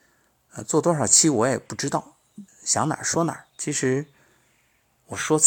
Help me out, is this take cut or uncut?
cut